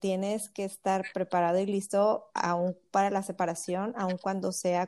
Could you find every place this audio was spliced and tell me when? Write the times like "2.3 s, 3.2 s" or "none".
none